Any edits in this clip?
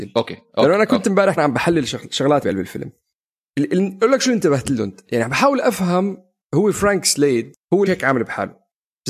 yes; 3 cuts; at 1.4 s, 2.4 s, 7.9 s

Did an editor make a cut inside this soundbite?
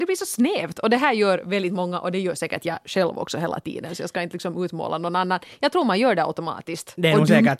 no; 0 cuts

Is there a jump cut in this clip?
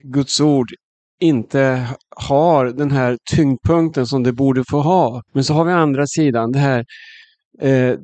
yes; 1 cut; at 5.3 s

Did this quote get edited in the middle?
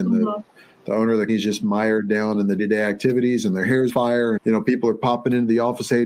yes; 4 cuts; at 1.3 s, 2.6 s, 3.9 s, 4.4 s

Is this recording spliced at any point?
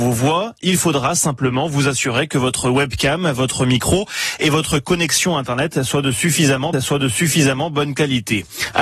yes; 1 cut; at 6.7 s

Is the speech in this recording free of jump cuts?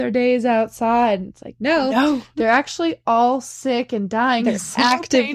yes; 0 cuts

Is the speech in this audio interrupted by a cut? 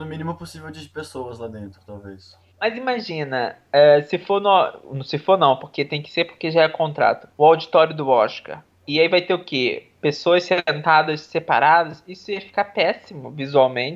yes; 2 cuts; at 2.5 s, 7.3 s

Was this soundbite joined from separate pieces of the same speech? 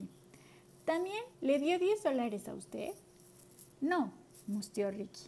yes; 2 cuts; at 1.3 s, 3.7 s

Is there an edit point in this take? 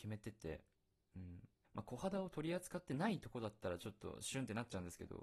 yes; 1 cut; at 1.6 s

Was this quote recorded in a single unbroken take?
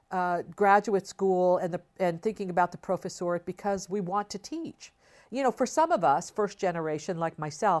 yes; 0 cuts

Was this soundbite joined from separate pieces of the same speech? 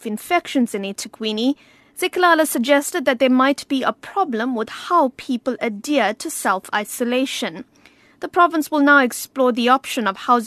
no; 0 cuts

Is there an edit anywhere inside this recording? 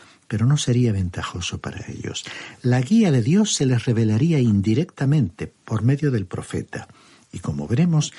no; 0 cuts

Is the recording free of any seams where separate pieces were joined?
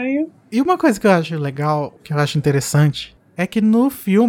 no; 1 cut; at 2.0 s

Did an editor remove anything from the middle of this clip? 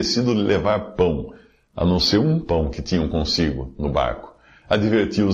no; 0 cuts

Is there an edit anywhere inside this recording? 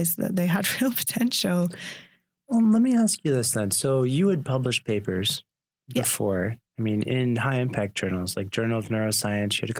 no; 0 cuts

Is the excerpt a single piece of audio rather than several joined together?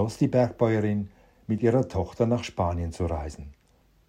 yes; 0 cuts

